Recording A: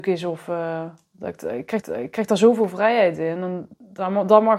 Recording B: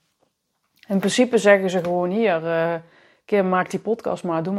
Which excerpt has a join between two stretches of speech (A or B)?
A